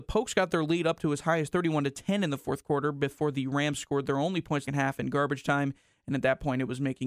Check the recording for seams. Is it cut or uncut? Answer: cut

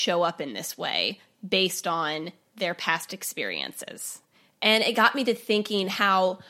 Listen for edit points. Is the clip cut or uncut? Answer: uncut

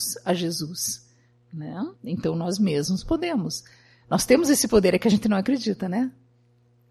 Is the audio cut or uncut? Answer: cut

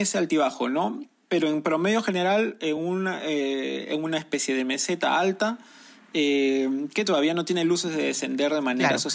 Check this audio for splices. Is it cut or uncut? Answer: uncut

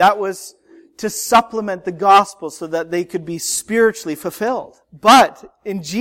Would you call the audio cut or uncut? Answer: cut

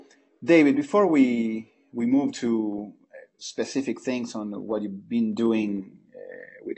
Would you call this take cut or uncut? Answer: uncut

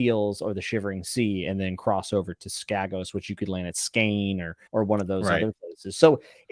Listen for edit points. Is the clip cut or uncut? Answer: cut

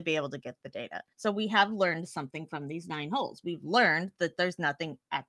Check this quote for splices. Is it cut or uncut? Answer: cut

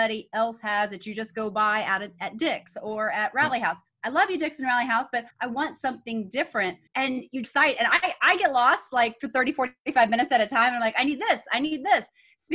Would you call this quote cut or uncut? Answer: cut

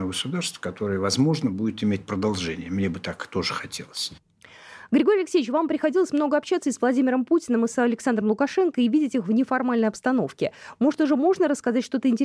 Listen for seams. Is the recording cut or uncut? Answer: uncut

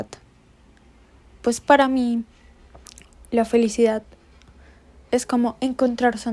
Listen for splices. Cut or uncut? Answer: uncut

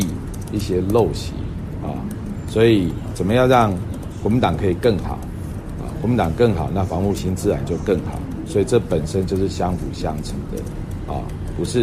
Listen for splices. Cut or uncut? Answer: uncut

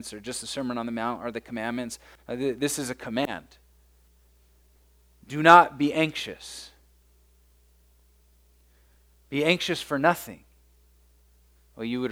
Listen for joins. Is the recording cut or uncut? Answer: uncut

